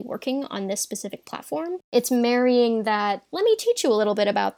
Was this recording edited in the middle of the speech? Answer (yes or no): no